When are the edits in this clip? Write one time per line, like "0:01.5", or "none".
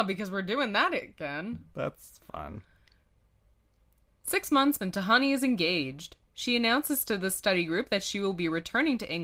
0:04.8
0:06.2